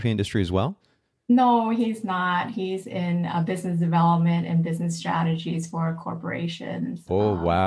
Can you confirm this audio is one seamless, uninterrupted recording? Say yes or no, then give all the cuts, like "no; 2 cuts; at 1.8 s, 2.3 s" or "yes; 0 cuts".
yes; 0 cuts